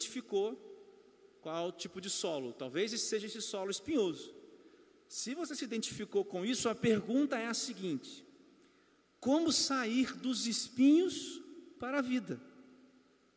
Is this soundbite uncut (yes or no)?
yes